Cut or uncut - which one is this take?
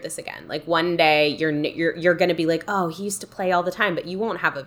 uncut